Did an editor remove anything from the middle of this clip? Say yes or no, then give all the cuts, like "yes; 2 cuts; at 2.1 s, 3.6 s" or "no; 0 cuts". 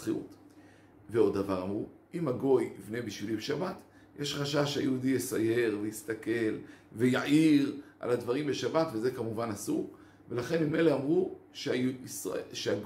no; 0 cuts